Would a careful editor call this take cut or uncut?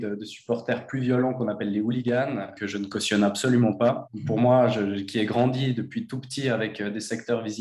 uncut